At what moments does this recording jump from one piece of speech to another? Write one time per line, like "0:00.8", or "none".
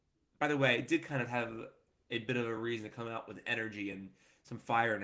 none